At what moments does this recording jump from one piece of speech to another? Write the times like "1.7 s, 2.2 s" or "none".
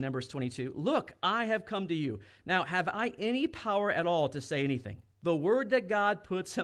5.1 s